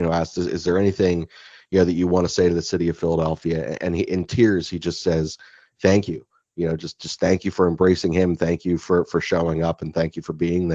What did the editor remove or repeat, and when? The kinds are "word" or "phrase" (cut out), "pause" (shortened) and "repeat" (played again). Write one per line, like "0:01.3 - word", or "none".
none